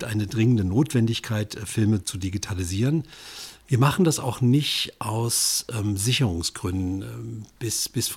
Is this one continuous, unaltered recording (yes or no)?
no